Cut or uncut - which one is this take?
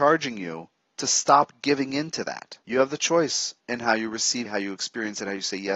cut